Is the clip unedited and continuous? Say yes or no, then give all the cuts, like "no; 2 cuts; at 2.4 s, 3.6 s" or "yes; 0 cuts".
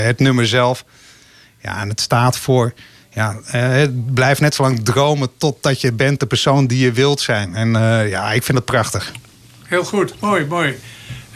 yes; 0 cuts